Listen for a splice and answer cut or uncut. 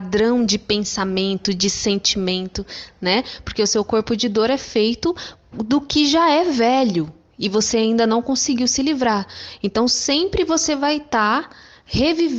uncut